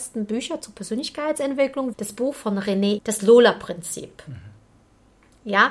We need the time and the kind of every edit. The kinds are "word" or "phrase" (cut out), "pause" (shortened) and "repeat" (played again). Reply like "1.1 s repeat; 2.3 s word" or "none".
1.9 s word; 3.0 s word